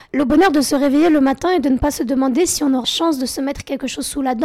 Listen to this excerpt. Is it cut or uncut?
cut